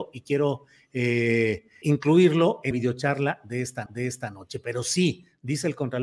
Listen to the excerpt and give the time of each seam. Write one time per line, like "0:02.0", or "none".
0:01.8
0:02.7
0:03.9

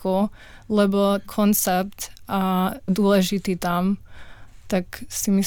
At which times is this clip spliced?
0:01.2
0:02.9

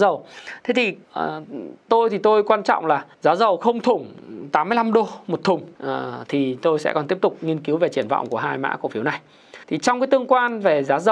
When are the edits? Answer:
0:01.0
0:03.1
0:05.7
0:09.6

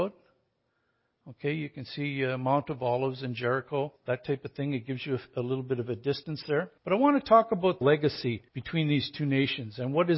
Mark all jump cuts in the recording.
0:04.0
0:06.8
0:07.8
0:08.5

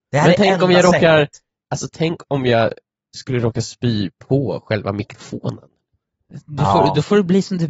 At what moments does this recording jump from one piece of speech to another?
none

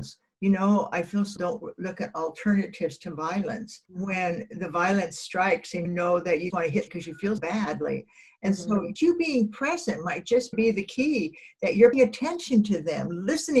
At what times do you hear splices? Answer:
0:01.4
0:03.8
0:05.8
0:06.5
0:06.9
0:07.4
0:09.0
0:10.5
0:11.9

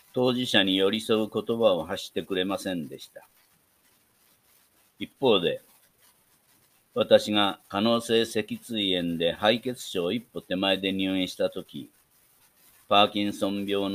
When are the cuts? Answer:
none

